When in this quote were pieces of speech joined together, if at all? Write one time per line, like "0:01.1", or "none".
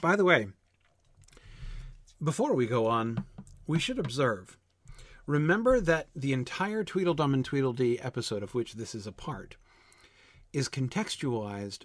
none